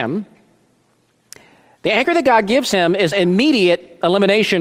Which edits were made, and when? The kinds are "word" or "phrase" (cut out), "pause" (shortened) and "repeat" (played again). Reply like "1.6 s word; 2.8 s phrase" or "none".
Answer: 3.1 s word